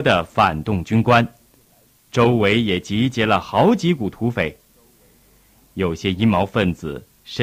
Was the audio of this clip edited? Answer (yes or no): no